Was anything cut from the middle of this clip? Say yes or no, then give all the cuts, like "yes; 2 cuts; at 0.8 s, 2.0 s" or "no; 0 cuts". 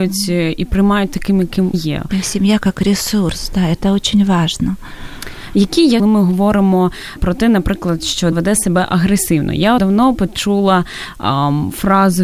yes; 5 cuts; at 1.7 s, 6.0 s, 7.2 s, 8.3 s, 9.8 s